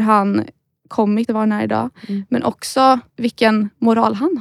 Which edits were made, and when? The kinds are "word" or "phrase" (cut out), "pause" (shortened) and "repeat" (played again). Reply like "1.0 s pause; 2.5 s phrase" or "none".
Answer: 1.3 s word; 3.1 s pause